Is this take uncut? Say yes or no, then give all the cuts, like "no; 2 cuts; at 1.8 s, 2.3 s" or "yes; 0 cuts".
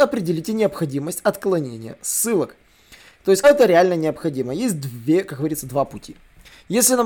no; 1 cut; at 3.4 s